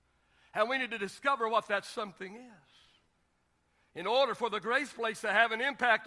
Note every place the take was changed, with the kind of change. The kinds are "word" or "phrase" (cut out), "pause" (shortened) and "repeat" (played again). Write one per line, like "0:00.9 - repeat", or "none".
none